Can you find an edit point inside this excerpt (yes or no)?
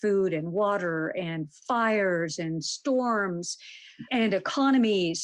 yes